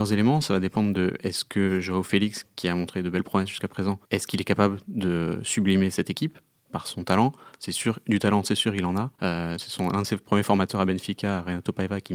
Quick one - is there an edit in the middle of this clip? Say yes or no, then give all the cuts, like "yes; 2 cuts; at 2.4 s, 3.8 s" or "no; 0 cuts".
yes; 3 cuts; at 4.0 s, 9.1 s, 9.6 s